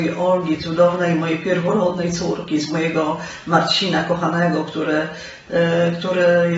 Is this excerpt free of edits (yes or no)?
yes